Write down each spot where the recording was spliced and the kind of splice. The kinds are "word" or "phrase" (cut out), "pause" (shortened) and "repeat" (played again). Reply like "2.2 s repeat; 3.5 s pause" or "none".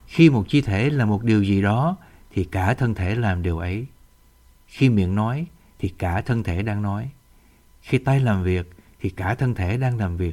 none